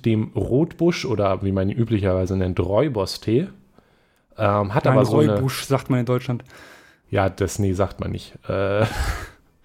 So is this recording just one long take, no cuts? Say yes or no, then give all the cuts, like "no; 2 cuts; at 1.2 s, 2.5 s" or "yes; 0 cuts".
yes; 0 cuts